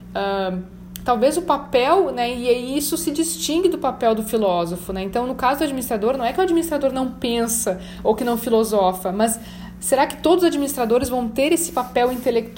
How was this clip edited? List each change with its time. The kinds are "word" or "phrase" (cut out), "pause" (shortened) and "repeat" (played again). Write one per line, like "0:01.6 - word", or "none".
none

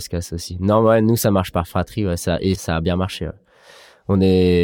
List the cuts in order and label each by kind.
0:02.5 - word

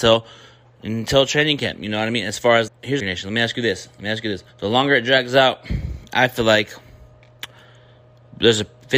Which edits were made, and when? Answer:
0:02.7 - word
0:03.0 - phrase
0:04.5 - pause

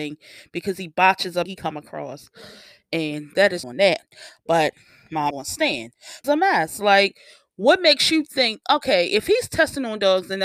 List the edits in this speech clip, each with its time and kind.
0:01.5 - word
0:03.6 - phrase
0:05.3 - word
0:06.2 - phrase

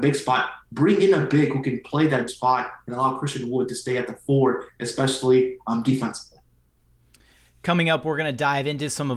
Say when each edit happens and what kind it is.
0:02.3 - word

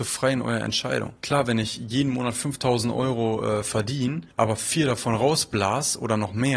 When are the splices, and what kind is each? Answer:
0:01.2 - pause
0:04.3 - pause

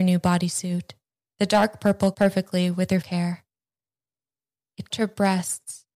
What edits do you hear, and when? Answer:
0:01.1 - pause
0:02.1 - word
0:03.0 - phrase
0:04.9 - word

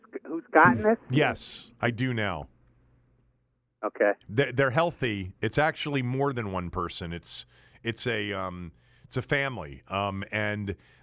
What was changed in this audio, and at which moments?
none

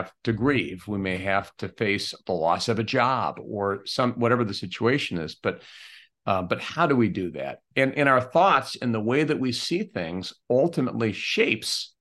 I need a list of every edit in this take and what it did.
none

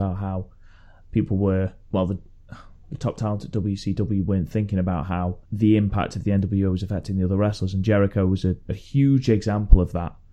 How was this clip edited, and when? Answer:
0:01.8 - pause
0:05.5 - pause
0:08.6 - pause

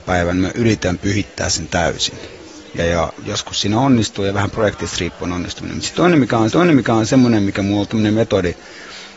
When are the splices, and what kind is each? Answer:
0:02.8 - word
0:03.2 - word
0:06.5 - repeat

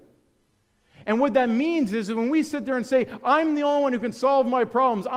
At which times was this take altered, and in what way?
none

